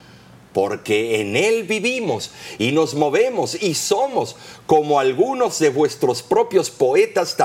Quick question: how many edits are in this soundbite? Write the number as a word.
zero